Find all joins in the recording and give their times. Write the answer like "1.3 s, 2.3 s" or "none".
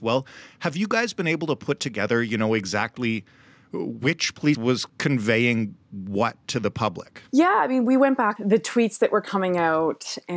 4.5 s, 4.9 s, 7.3 s, 8.4 s